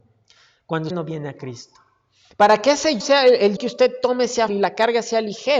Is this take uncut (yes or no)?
no